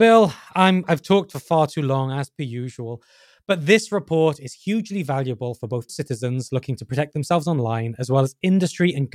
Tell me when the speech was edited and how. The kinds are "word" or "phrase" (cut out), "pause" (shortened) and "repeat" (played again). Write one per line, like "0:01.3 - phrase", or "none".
0:05.9 - word